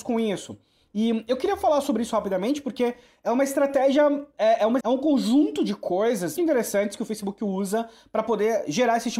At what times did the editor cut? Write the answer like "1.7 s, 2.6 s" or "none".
4.8 s, 6.4 s